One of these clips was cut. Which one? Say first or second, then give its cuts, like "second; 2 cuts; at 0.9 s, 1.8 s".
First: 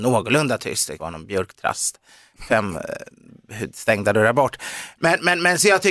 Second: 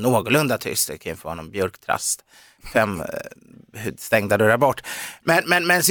first; 1 cut; at 1.0 s